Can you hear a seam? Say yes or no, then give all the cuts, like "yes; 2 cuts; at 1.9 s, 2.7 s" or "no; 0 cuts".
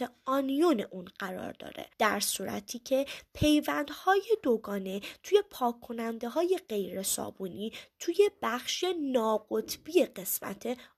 yes; 1 cut; at 1.9 s